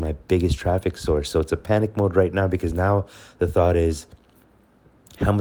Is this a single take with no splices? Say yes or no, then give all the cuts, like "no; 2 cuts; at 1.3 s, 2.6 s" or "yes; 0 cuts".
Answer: yes; 0 cuts